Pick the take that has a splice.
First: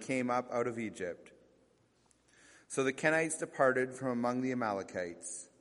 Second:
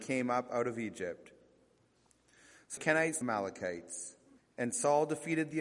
second; 3 cuts; at 2.8 s, 3.2 s, 4.4 s

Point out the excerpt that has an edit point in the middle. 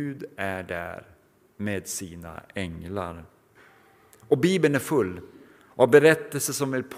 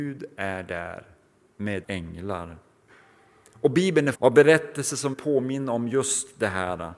second; 3 cuts; at 1.8 s, 4.1 s, 5.1 s

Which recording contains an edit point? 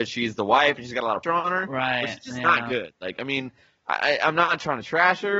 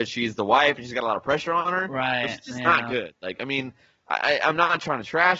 first; 1 cut; at 1.2 s

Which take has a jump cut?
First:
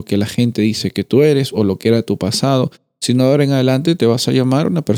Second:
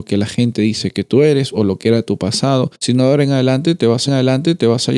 second; 2 cuts; at 2.8 s, 4.1 s

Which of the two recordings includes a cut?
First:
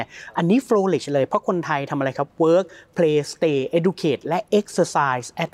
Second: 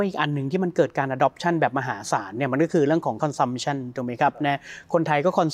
second; 1 cut; at 3.2 s

